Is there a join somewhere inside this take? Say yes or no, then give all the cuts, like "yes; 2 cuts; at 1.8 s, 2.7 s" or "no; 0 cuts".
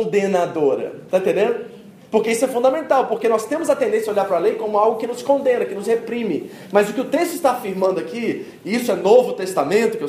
no; 0 cuts